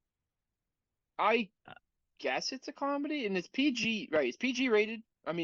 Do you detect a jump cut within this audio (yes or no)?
no